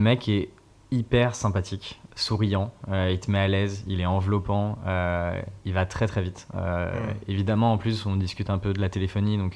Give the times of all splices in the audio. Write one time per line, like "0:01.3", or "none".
none